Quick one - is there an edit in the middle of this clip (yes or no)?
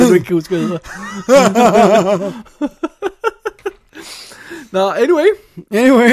no